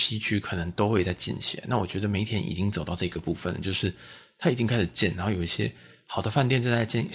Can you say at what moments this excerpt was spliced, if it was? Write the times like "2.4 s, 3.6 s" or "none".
none